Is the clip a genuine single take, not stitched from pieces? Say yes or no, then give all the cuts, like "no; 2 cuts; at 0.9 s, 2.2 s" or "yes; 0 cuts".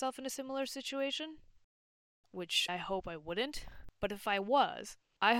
no; 1 cut; at 2.7 s